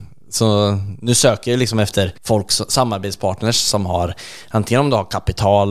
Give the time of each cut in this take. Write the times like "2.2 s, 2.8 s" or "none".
2.2 s